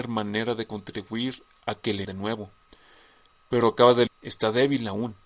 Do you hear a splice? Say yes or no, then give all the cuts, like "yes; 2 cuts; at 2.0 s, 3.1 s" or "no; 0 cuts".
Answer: yes; 2 cuts; at 2.0 s, 4.1 s